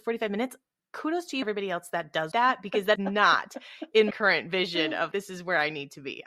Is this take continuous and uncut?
no; 5 cuts; at 1.4 s, 2.3 s, 3.0 s, 4.1 s, 5.1 s

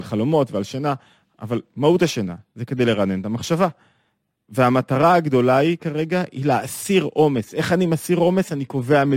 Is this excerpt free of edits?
yes; 0 cuts

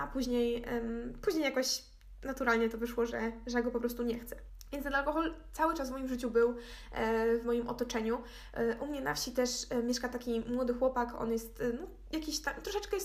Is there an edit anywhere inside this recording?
no; 0 cuts

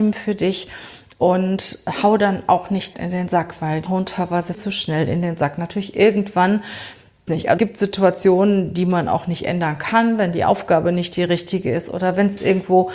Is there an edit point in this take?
yes; 5 cuts; at 2.9 s, 3.9 s, 4.5 s, 7.3 s, 7.6 s

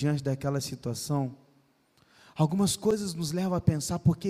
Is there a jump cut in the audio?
no; 0 cuts

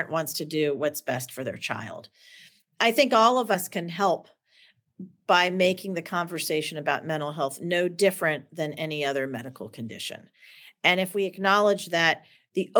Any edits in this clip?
no; 0 cuts

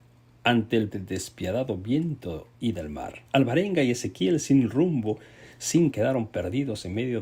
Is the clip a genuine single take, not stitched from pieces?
no; 4 cuts; at 0.9 s, 2.5 s, 3.3 s, 5.9 s

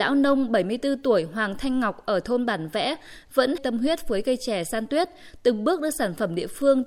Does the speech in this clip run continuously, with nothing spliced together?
no; 1 cut; at 3.6 s

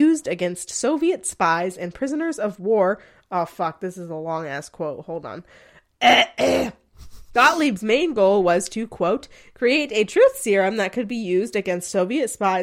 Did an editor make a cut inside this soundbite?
no; 0 cuts

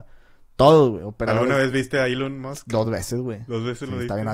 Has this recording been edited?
no; 0 cuts

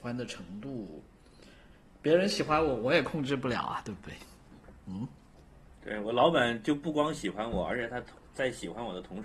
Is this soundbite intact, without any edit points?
yes; 0 cuts

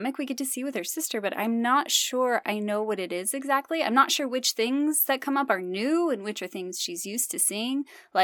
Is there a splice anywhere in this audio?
no; 0 cuts

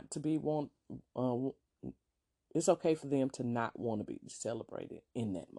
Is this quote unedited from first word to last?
yes; 0 cuts

